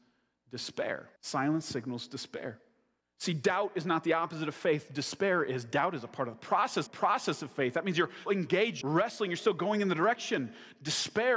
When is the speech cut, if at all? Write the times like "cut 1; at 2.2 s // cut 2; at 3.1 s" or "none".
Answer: cut 1; at 1.2 s // cut 2; at 3.0 s // cut 3; at 6.9 s // cut 4; at 8.3 s // cut 5; at 8.8 s